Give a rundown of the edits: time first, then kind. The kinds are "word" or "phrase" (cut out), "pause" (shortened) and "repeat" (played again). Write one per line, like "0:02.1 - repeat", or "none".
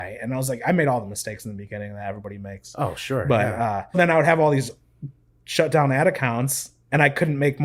0:03.9 - word